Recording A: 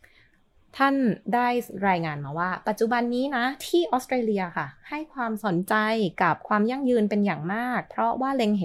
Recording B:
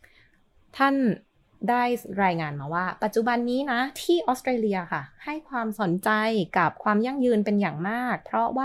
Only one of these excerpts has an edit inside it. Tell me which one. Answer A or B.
A